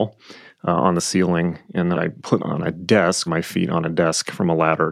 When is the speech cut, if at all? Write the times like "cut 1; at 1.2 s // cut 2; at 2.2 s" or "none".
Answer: cut 1; at 1.9 s // cut 2; at 2.4 s // cut 3; at 3.3 s